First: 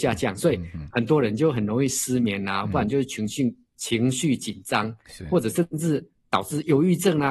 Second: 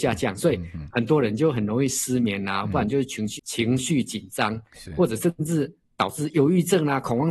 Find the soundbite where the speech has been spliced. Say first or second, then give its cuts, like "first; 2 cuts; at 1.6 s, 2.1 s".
second; 1 cut; at 3.4 s